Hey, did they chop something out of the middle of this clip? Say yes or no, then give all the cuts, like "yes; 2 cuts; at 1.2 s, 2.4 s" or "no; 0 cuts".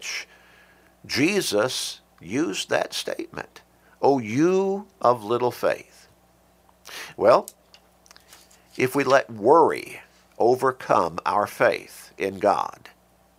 no; 0 cuts